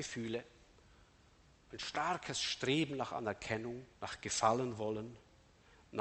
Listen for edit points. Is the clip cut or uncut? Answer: cut